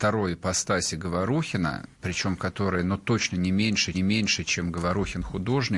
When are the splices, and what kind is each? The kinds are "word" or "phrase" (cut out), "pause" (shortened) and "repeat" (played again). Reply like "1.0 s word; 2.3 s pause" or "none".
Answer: 1.9 s pause; 3.9 s repeat

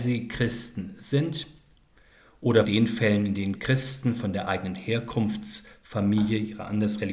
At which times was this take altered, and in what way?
2.6 s word; 3.5 s word

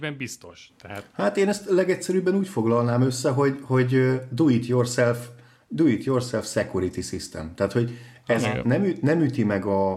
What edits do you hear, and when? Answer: none

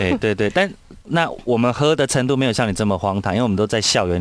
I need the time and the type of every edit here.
1.0 s pause

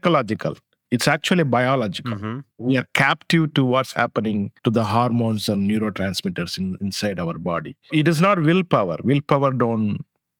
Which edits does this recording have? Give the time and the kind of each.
2.5 s pause; 4.6 s pause

